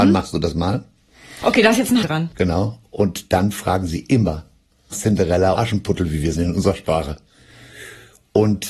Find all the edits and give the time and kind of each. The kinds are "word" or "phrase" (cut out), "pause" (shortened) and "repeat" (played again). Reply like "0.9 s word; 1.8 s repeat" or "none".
2.0 s word; 4.9 s word; 5.6 s word; 6.3 s word